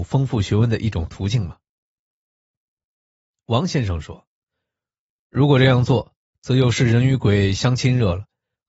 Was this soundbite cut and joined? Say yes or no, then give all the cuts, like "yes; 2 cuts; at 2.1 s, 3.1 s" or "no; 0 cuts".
no; 0 cuts